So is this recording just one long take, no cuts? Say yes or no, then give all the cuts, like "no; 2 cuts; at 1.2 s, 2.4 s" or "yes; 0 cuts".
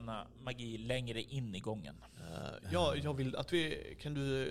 yes; 0 cuts